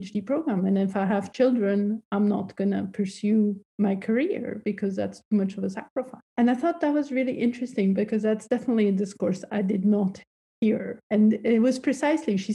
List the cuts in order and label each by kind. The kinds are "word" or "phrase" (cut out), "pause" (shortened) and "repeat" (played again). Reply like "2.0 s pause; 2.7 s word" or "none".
3.7 s pause; 6.3 s pause; 11.0 s pause